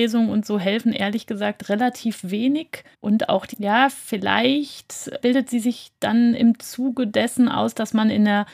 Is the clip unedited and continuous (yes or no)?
no